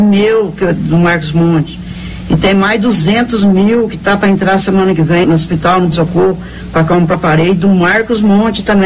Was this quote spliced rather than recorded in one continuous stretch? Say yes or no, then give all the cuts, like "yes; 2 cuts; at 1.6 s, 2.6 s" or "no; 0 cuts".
yes; 3 cuts; at 5.2 s, 5.9 s, 7.1 s